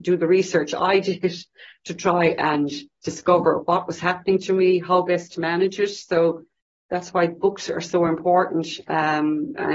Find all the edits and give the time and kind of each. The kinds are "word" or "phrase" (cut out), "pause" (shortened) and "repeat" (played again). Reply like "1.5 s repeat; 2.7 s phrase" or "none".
none